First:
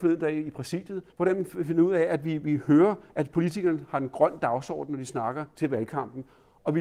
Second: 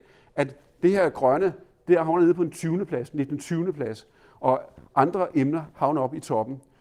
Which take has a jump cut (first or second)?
first